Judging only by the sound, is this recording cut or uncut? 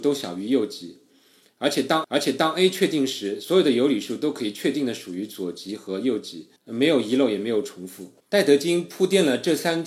cut